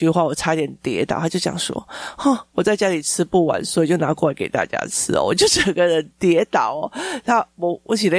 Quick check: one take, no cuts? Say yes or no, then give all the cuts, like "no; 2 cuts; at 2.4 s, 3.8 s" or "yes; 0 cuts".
yes; 0 cuts